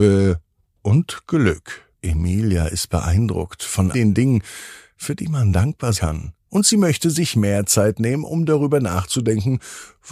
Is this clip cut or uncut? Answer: cut